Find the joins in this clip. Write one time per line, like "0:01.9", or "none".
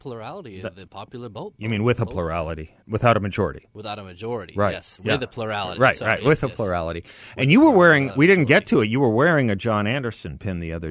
0:02.8